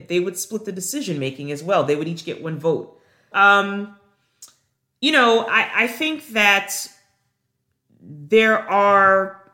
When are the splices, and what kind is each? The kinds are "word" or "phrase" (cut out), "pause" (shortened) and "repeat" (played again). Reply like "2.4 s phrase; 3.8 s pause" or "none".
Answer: 3.3 s word